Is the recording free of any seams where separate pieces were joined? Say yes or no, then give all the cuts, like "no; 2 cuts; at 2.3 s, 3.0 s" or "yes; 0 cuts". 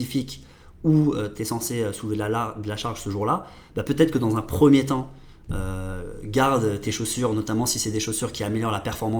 yes; 0 cuts